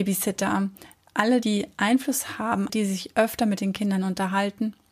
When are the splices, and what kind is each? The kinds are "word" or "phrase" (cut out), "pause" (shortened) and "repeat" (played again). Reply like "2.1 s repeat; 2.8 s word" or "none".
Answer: 1.4 s word; 2.7 s word